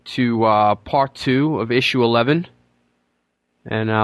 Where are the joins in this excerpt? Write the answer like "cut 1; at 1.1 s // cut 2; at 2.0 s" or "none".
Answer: none